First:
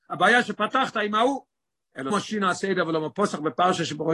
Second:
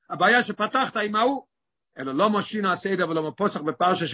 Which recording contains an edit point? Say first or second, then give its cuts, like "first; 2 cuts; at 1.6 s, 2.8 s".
first; 1 cut; at 2.1 s